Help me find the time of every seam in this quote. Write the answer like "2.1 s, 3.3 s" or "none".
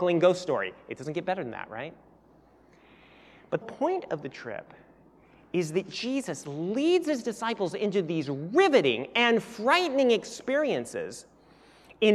3.6 s